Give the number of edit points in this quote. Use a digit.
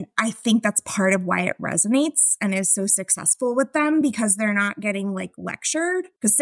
0